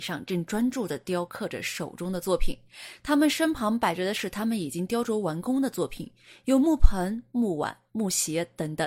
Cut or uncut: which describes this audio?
uncut